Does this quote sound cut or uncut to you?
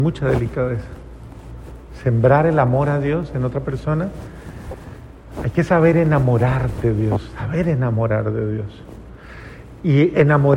uncut